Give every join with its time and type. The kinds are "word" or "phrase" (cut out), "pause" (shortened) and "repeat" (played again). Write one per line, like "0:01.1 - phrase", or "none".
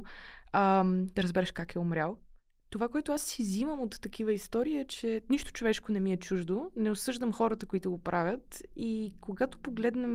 none